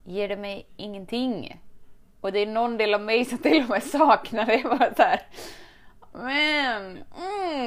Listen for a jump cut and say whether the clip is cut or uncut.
uncut